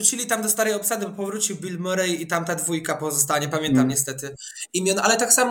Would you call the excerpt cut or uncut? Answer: uncut